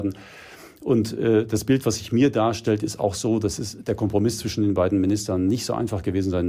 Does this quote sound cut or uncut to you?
uncut